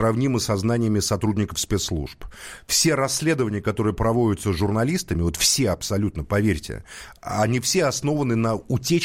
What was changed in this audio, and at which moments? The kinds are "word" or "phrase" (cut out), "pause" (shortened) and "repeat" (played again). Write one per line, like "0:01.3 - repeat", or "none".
none